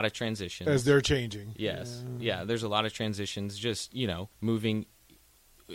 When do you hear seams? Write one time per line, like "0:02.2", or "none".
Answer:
0:04.3